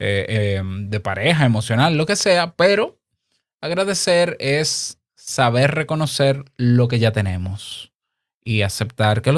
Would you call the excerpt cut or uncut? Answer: uncut